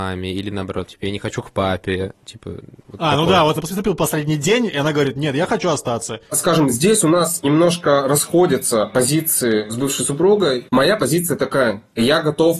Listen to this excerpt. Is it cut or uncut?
cut